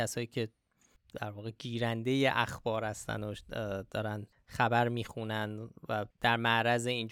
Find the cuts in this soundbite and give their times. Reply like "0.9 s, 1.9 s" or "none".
4.3 s, 6.1 s

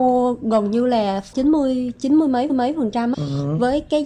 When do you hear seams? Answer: 1.3 s, 2.5 s, 3.1 s

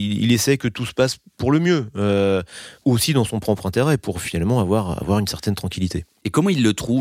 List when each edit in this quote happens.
none

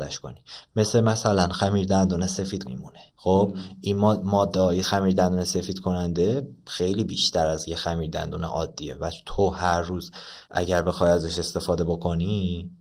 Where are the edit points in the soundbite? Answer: 2.6 s, 3.1 s, 4.8 s, 10.4 s

